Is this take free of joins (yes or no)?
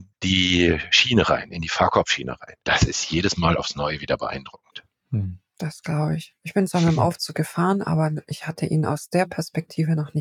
no